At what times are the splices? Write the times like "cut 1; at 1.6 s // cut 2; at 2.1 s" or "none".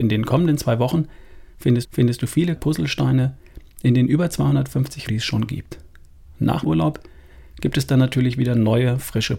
cut 1; at 1.8 s // cut 2; at 2.6 s // cut 3; at 5.1 s // cut 4; at 6.6 s